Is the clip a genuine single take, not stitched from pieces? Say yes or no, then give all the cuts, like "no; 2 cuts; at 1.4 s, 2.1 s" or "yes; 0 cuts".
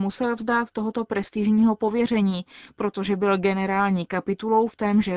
yes; 0 cuts